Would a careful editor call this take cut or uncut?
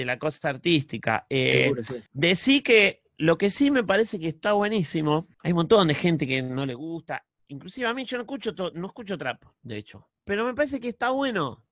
cut